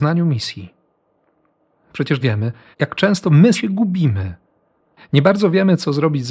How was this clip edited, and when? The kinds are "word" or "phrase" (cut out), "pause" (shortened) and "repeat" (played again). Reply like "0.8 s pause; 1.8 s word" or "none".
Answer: 2.2 s word; 2.7 s word; 3.5 s word